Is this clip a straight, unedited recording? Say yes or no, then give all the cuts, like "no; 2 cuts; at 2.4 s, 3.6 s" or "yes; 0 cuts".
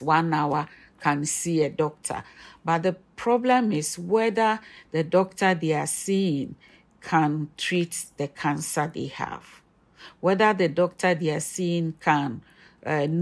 yes; 0 cuts